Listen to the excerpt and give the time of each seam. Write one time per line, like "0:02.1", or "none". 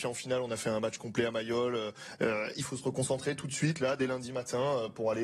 none